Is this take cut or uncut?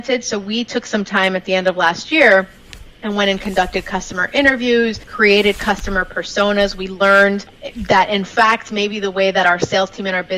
uncut